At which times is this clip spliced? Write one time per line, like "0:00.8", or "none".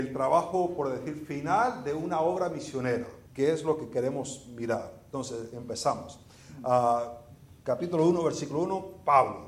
0:03.3